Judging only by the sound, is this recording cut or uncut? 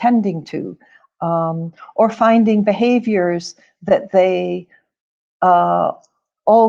uncut